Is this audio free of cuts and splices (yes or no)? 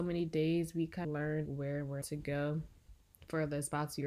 no